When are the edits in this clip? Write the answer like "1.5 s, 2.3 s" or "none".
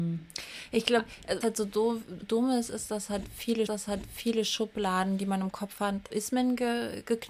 1.4 s, 2.2 s, 3.7 s, 6.1 s